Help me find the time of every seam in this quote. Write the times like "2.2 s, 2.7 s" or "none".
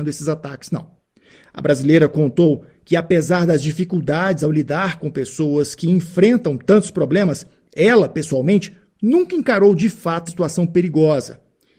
10.3 s